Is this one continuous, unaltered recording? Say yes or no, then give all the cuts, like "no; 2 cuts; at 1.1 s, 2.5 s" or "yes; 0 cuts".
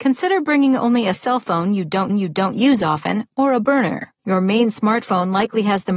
no; 3 cuts; at 1.1 s, 2.1 s, 4.2 s